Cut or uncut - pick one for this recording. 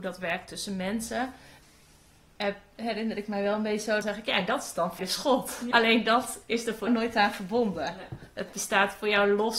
cut